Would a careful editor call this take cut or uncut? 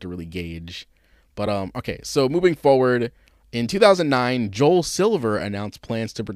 uncut